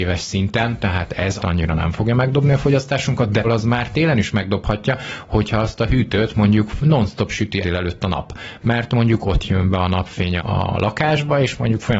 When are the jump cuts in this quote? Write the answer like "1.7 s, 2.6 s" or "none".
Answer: 1.4 s, 3.4 s, 7.6 s, 10.4 s